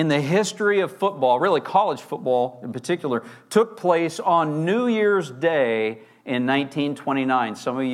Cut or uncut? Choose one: uncut